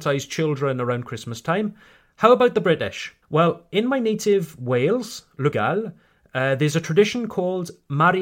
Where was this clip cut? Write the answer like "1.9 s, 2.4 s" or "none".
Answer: 3.2 s, 5.5 s